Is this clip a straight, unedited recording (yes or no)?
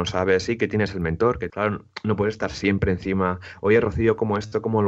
no